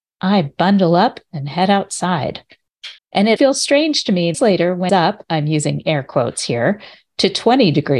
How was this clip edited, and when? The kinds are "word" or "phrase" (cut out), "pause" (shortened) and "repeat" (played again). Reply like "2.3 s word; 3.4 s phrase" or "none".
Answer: 3.0 s pause; 3.4 s word; 4.3 s phrase; 4.9 s phrase